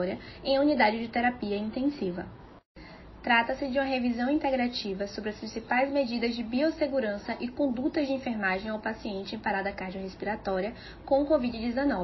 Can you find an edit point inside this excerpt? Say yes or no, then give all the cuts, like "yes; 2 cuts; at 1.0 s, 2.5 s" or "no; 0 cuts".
no; 0 cuts